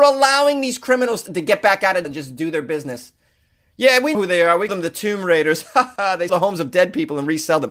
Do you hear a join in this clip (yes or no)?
yes